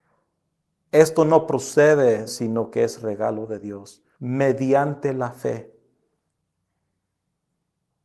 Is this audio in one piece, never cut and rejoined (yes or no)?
no